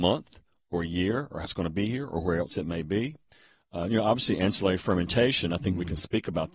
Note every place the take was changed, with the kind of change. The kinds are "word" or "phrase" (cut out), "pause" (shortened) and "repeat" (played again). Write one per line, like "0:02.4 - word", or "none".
0:01.4 - word